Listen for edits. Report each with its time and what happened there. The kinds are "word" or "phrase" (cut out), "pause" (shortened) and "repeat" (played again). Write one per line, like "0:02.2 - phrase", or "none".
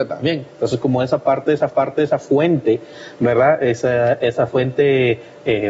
0:01.7 - repeat